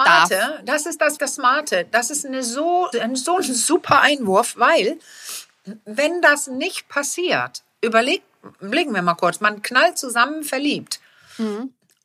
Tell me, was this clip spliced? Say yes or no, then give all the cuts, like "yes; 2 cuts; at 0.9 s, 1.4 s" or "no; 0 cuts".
yes; 2 cuts; at 1.2 s, 2.9 s